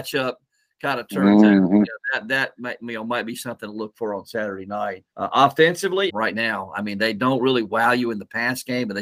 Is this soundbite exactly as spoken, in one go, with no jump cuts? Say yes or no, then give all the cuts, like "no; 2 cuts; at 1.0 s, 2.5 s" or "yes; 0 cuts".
no; 2 cuts; at 5.1 s, 6.1 s